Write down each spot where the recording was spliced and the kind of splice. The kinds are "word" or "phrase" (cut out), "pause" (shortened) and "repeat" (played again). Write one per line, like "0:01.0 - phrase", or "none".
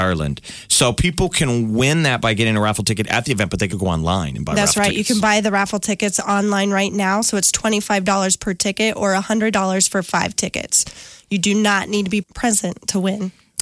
0:03.7 - word
0:12.2 - word